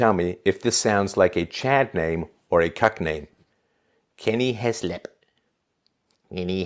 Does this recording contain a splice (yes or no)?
no